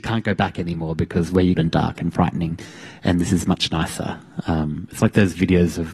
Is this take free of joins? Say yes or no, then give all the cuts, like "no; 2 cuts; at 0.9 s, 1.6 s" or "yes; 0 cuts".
no; 1 cut; at 1.6 s